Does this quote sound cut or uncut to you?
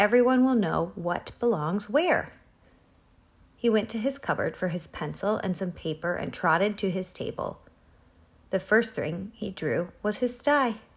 uncut